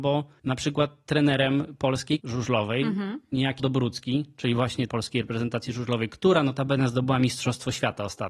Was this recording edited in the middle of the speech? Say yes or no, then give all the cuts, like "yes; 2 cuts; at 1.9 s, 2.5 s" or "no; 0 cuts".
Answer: yes; 3 cuts; at 2.2 s, 3.6 s, 4.9 s